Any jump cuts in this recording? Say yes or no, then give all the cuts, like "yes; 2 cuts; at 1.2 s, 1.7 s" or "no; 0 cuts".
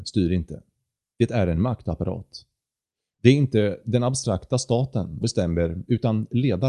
yes; 1 cut; at 5.2 s